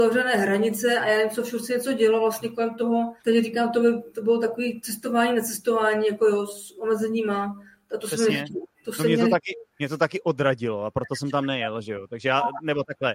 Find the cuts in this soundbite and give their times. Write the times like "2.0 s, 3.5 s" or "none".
3.2 s, 8.7 s, 9.7 s